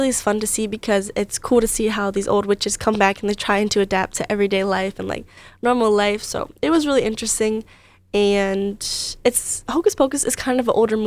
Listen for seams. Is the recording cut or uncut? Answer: uncut